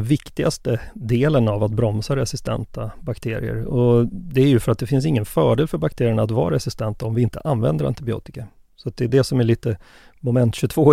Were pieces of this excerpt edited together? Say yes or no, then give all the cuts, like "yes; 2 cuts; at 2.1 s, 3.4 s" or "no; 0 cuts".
no; 0 cuts